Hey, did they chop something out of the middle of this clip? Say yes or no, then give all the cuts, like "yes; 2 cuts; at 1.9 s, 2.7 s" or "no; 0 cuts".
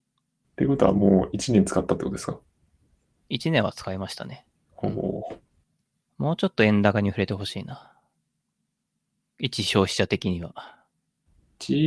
no; 0 cuts